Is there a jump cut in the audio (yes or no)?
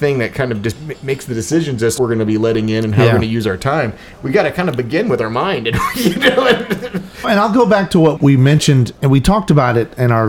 yes